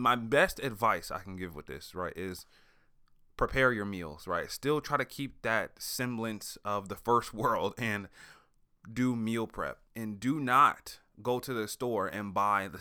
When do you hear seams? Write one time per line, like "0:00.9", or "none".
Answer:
0:09.9